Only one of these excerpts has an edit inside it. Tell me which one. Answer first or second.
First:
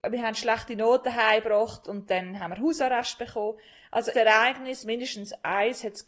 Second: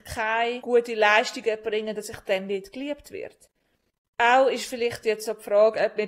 first